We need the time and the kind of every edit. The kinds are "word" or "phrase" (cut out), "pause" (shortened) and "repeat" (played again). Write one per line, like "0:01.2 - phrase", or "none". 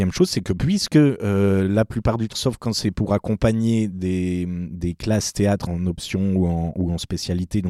0:02.3 - word
0:05.7 - word